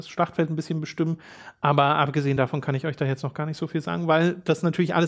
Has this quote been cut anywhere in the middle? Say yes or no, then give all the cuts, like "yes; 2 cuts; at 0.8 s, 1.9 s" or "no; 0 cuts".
no; 0 cuts